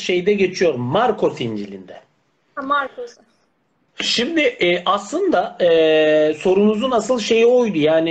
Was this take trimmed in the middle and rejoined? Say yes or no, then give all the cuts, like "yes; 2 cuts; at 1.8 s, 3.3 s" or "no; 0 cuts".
no; 0 cuts